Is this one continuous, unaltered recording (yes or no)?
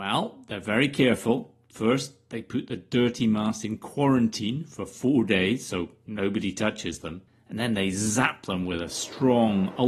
no